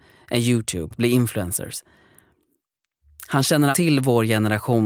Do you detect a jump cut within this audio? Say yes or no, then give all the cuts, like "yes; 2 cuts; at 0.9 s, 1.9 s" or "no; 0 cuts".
yes; 2 cuts; at 0.9 s, 3.7 s